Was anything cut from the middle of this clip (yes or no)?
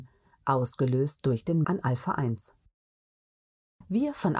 yes